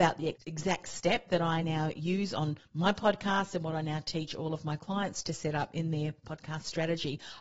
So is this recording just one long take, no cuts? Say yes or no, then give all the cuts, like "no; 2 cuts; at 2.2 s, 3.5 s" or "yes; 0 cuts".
yes; 0 cuts